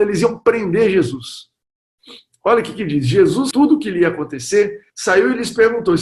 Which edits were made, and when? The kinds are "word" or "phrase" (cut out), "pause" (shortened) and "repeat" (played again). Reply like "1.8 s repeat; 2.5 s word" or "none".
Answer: 3.5 s word; 4.9 s pause